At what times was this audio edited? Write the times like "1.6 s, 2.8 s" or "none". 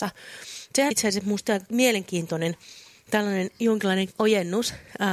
0.9 s, 4.1 s